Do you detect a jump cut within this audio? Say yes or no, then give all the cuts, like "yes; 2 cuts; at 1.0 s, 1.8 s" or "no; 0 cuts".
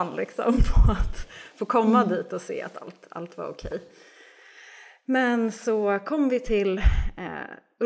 no; 0 cuts